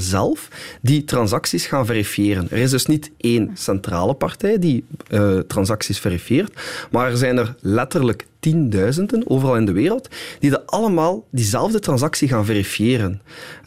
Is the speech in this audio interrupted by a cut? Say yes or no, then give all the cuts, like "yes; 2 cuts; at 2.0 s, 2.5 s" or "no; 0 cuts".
no; 0 cuts